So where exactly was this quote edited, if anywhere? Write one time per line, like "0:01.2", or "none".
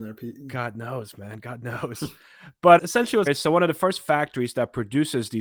0:02.8
0:03.3